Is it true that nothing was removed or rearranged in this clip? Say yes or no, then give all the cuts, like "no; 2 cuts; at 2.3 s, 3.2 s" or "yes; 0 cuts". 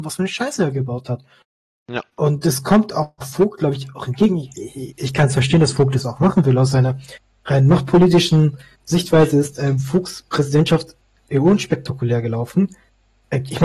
yes; 0 cuts